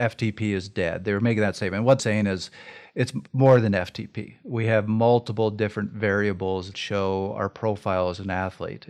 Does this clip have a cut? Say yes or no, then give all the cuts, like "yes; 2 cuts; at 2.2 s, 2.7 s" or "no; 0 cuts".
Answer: yes; 3 cuts; at 2.0 s, 3.3 s, 6.7 s